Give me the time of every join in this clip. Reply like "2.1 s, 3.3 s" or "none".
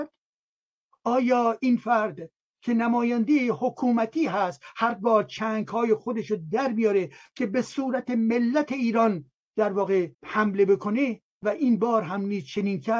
10.1 s, 11.3 s